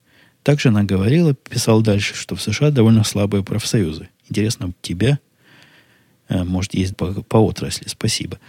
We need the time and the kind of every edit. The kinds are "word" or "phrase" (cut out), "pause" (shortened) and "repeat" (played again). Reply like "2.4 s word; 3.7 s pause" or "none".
2.1 s word; 4.7 s phrase; 6.9 s word